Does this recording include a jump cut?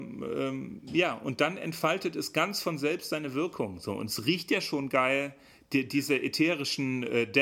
no; 0 cuts

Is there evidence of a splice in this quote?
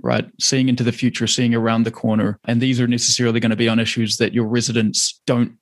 no; 0 cuts

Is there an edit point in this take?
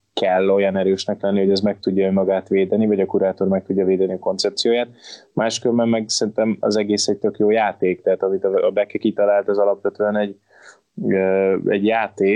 no; 0 cuts

